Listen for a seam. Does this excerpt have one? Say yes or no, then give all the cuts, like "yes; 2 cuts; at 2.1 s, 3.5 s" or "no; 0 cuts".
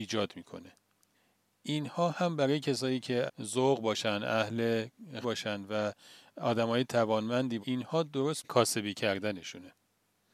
yes; 4 cuts; at 3.3 s, 5.2 s, 7.6 s, 8.4 s